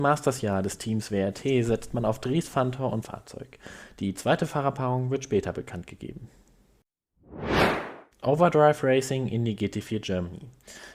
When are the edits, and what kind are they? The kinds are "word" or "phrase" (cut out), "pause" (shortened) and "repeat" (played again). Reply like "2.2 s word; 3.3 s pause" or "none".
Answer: 3.0 s phrase; 8.1 s pause